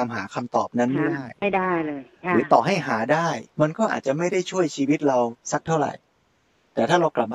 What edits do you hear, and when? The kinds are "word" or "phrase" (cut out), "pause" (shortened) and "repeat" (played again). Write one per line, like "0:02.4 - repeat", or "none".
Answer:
0:03.5 - pause
0:05.4 - pause